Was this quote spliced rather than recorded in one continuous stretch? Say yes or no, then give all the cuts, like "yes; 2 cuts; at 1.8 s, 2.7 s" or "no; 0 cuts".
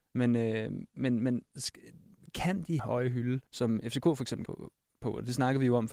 yes; 4 cuts; at 1.5 s, 2.8 s, 3.5 s, 4.5 s